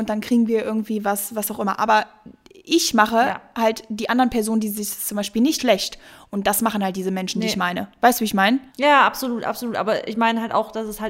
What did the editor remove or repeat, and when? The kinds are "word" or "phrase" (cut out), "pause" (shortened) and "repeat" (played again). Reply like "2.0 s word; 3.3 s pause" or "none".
5.6 s phrase; 8.7 s pause

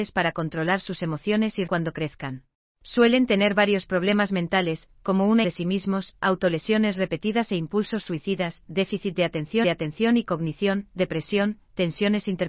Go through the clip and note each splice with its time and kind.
1.7 s word; 2.6 s pause; 5.4 s phrase; 9.6 s repeat

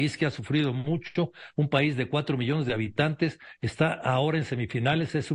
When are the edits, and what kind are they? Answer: none

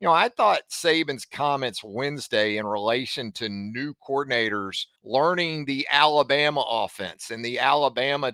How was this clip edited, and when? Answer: 5.0 s pause

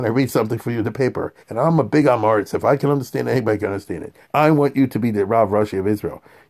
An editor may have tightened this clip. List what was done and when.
1.4 s pause; 4.2 s pause

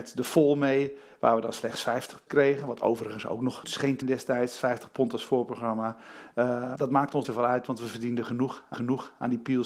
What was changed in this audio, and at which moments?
2.3 s word; 3.6 s word; 4.0 s word; 6.8 s word; 7.2 s word; 8.7 s repeat

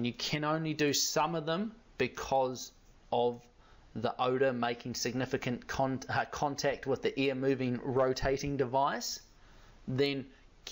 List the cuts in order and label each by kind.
none

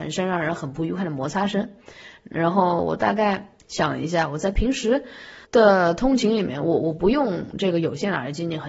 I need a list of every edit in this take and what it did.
3.6 s pause; 5.4 s pause

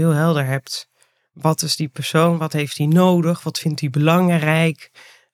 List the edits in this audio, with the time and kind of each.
none

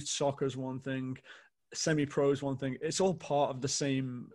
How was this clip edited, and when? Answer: none

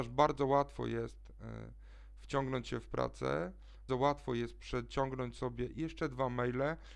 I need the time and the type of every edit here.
3.9 s word

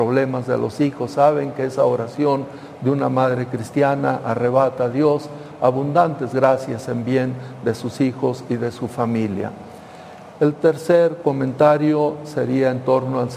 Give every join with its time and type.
none

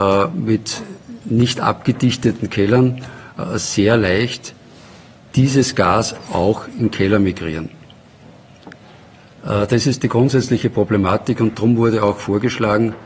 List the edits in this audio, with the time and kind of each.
none

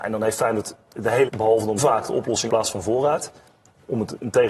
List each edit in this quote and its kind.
1.3 s phrase; 1.8 s phrase; 2.5 s phrase

